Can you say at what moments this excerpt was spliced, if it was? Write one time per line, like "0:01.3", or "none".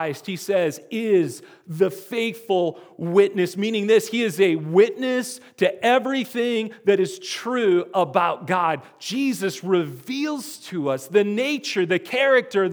none